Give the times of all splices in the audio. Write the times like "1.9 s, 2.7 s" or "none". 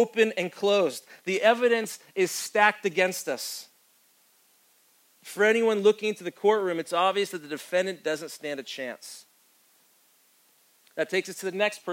none